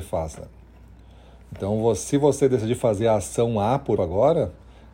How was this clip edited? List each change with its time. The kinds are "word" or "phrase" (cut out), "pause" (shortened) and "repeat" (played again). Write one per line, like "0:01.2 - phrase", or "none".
0:04.0 - word